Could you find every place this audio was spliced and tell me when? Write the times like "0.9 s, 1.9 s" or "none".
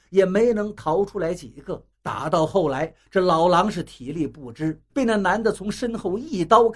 1.9 s, 4.9 s